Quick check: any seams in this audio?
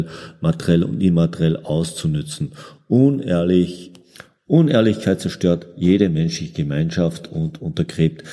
no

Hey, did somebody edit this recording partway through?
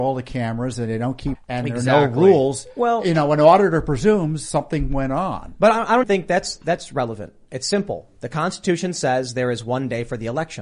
yes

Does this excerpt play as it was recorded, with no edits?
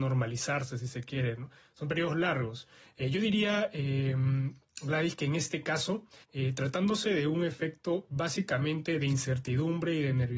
no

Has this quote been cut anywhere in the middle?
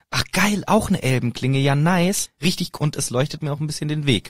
yes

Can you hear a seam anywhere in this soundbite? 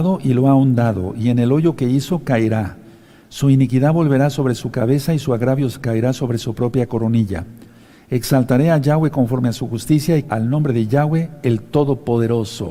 yes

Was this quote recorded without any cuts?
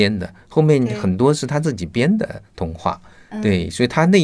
yes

